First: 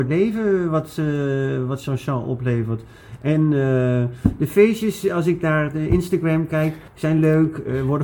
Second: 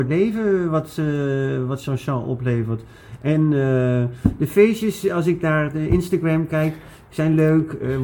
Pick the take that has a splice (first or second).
first